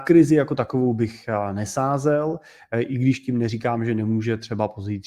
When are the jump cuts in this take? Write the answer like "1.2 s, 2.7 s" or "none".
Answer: none